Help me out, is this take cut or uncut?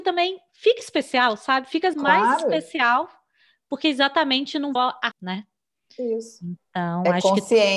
cut